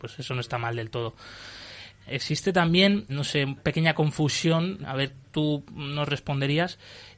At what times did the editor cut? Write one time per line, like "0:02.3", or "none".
0:02.0
0:03.1
0:03.6
0:04.8
0:05.2